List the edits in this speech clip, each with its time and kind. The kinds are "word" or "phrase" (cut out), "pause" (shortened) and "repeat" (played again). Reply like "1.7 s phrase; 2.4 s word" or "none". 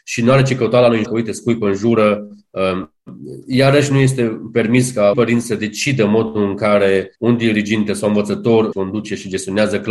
1.0 s word; 5.1 s word; 7.1 s pause; 8.7 s word